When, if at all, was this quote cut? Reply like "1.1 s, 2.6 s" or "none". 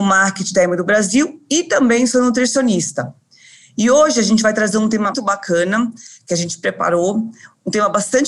5.1 s